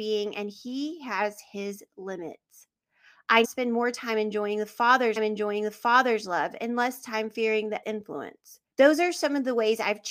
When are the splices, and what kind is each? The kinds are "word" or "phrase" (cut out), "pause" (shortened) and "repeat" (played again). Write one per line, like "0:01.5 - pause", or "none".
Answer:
0:03.4 - word
0:05.2 - repeat
0:07.8 - word
0:08.7 - pause